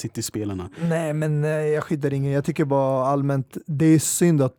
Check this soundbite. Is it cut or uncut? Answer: uncut